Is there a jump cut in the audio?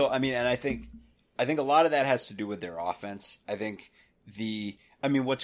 no; 0 cuts

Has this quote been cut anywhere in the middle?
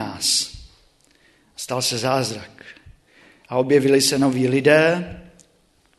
no; 0 cuts

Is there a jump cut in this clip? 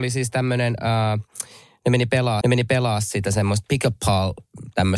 yes; 1 cut; at 2.4 s

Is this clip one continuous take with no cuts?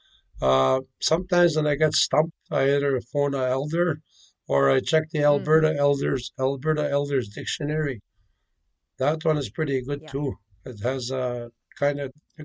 yes; 0 cuts

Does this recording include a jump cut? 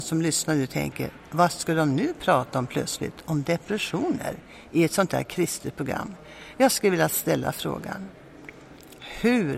no; 0 cuts

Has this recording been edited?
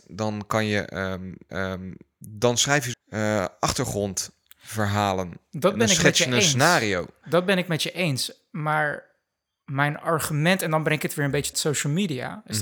yes; 3 cuts; at 1.5 s, 2.9 s, 11.5 s

